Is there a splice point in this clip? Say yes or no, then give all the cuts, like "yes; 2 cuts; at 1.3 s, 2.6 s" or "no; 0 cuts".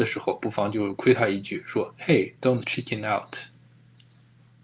no; 0 cuts